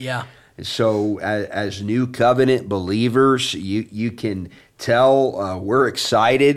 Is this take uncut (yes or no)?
yes